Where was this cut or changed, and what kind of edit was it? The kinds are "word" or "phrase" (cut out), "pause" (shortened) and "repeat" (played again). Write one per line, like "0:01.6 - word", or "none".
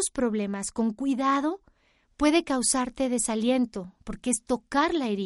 none